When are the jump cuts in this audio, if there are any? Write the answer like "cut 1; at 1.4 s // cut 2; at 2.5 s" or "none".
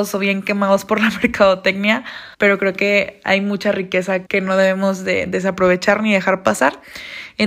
cut 1; at 2.3 s // cut 2; at 4.3 s